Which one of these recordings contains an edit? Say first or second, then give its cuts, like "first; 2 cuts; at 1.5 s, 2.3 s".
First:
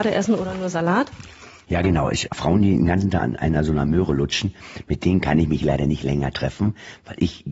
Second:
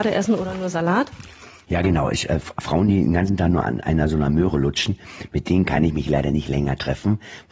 first; 2 cuts; at 2.3 s, 3.2 s